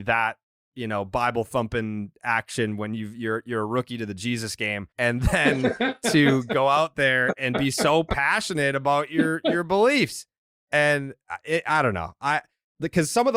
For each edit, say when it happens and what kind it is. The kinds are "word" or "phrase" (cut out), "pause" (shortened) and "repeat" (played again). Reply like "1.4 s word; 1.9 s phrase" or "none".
4.9 s pause

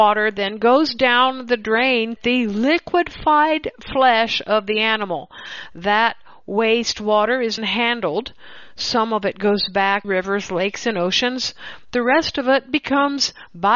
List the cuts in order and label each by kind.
2.2 s phrase; 7.6 s word; 10.0 s word

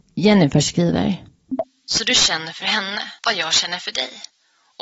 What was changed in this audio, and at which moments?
3.2 s pause

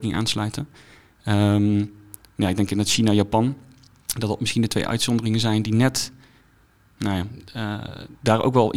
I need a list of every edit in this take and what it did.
none

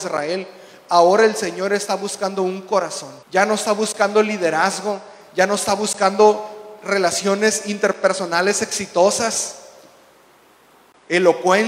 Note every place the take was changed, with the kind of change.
3.2 s pause

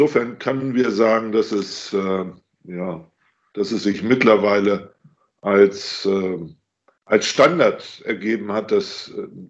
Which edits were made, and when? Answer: none

